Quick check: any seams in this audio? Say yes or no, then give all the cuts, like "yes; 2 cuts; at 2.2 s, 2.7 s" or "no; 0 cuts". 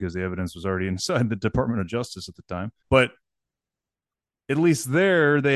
yes; 1 cut; at 2.8 s